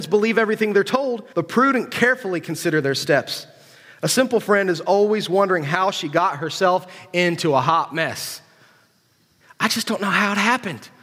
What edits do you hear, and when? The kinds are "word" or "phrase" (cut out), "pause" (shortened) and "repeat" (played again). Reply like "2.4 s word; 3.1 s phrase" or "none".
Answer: 1.3 s pause

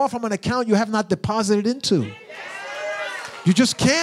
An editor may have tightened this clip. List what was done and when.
none

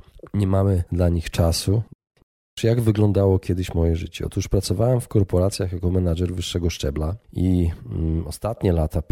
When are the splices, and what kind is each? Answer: none

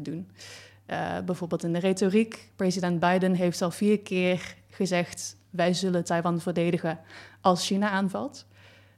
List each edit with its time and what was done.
none

